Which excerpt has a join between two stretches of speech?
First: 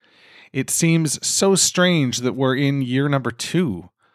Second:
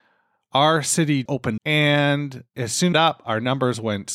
second; 4 cuts; at 1.3 s, 1.6 s, 2.5 s, 2.9 s

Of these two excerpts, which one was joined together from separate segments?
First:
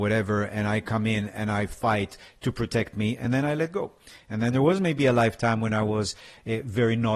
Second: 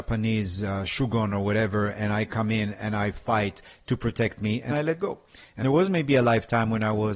second; 2 cuts; at 4.7 s, 5.6 s

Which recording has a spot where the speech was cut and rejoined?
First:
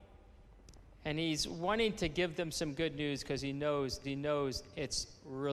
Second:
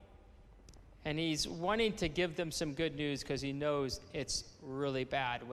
first; 1 cut; at 4.0 s

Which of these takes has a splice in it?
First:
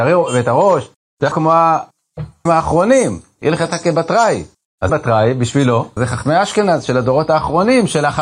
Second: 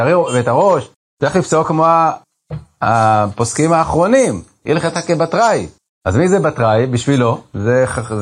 first; 4 cuts; at 1.3 s, 2.5 s, 4.9 s, 6.0 s

